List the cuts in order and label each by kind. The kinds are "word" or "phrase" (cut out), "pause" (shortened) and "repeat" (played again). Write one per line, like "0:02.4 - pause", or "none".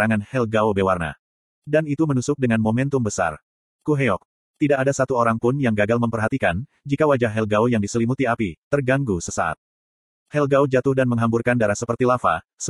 none